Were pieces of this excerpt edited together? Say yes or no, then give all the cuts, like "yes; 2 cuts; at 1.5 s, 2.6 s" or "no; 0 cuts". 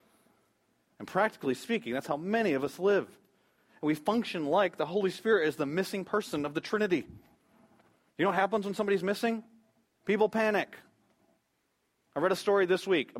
no; 0 cuts